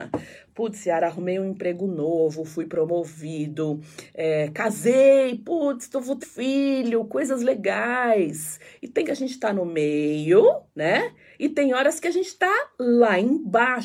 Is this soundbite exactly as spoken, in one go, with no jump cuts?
no; 3 cuts; at 6.2 s, 9.0 s, 10.7 s

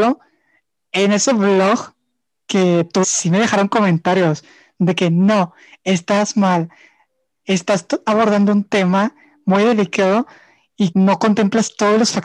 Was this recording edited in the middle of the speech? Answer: yes; 2 cuts; at 3.0 s, 10.9 s

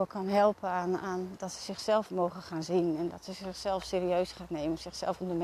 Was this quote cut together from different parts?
no; 0 cuts

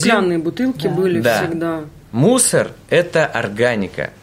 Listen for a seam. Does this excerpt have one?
yes; 1 cut; at 2.8 s

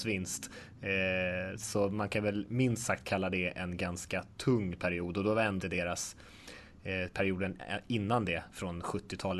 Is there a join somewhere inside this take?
yes; 1 cut; at 5.6 s

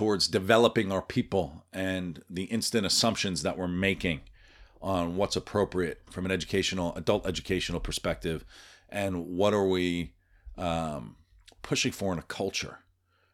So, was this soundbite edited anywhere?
no; 0 cuts

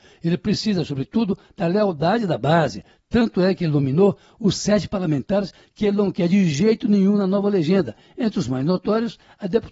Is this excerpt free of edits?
yes; 0 cuts

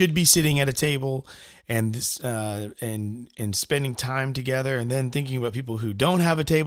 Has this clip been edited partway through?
no; 0 cuts

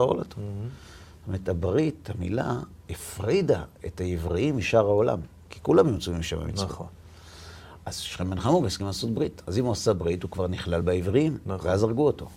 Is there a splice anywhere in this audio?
no; 0 cuts

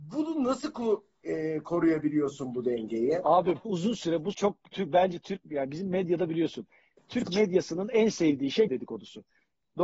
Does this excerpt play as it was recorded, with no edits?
no; 3 cuts; at 3.7 s, 4.3 s, 8.7 s

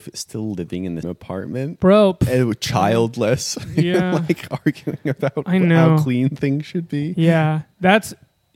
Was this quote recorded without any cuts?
no; 1 cut; at 1.0 s

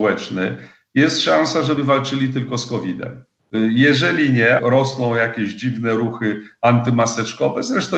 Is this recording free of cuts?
no; 2 cuts; at 1.8 s, 4.6 s

